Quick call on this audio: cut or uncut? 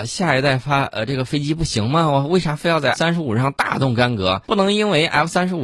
cut